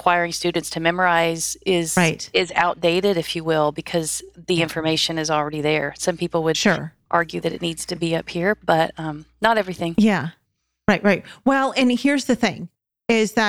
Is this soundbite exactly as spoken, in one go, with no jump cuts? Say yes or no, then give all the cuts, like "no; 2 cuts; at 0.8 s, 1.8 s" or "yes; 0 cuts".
yes; 0 cuts